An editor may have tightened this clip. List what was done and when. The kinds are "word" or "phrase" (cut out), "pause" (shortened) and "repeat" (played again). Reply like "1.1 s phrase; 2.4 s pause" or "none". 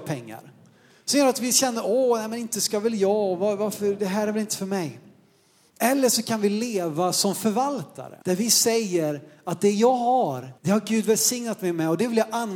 8.2 s pause; 10.6 s pause

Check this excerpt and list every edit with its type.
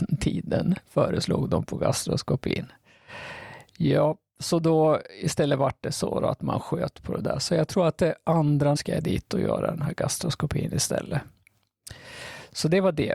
8.8 s word

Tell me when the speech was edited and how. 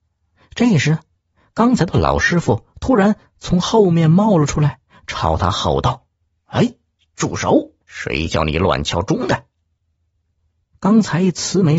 7.8 s pause

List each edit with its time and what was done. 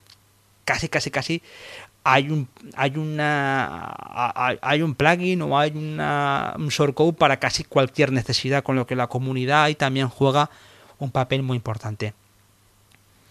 none

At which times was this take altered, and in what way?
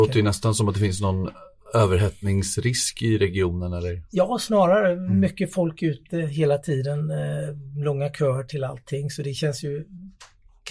none

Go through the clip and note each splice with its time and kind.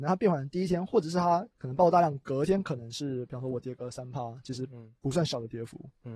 1.5 s pause

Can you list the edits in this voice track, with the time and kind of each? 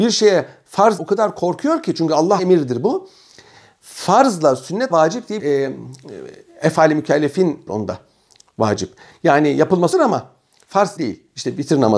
1.0 s word; 2.4 s word; 4.9 s word; 5.4 s word; 7.7 s word; 9.9 s word; 11.0 s word

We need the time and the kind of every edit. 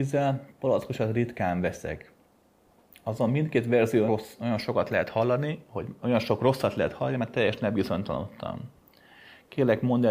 4.1 s word

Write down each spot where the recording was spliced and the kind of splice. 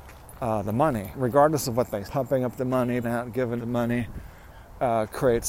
1.1 s word; 2.0 s word; 3.0 s word; 3.6 s word

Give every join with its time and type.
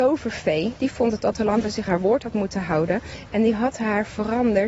1.9 s word

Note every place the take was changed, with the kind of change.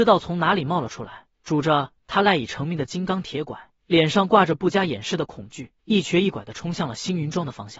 1.3 s pause; 3.8 s pause; 5.8 s pause

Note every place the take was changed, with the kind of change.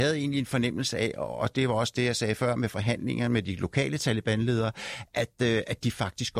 none

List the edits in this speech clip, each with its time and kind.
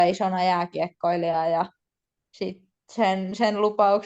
none

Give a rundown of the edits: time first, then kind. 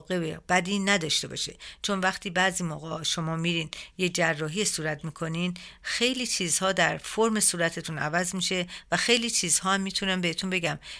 none

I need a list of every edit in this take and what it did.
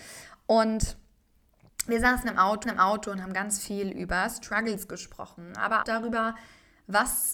2.6 s repeat; 5.8 s word

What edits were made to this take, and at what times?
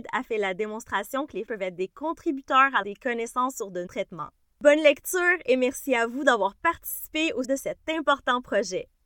1.5 s word; 2.8 s word; 3.9 s word; 4.4 s pause; 7.4 s word

